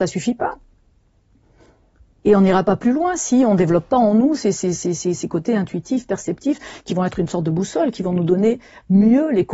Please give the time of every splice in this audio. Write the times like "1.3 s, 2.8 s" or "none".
none